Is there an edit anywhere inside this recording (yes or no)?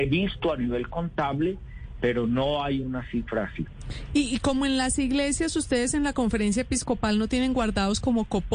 no